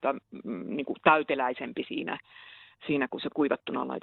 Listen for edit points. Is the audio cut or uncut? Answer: uncut